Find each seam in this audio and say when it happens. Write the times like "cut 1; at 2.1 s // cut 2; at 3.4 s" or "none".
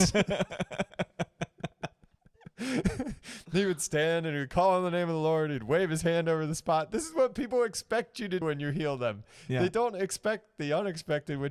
cut 1; at 8.4 s